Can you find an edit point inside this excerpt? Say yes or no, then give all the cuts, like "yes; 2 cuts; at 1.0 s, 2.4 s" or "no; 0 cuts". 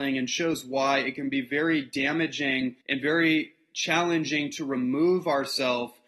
yes; 1 cut; at 2.8 s